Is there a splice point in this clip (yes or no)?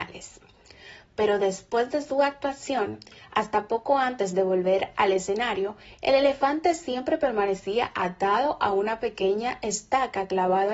no